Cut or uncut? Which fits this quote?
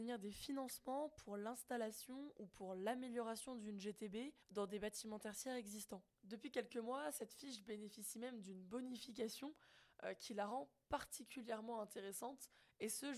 cut